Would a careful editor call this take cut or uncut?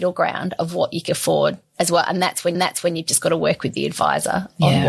cut